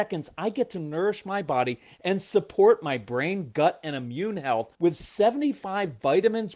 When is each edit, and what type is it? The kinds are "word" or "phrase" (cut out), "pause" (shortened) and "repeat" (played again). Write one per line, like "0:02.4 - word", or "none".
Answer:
0:04.7 - pause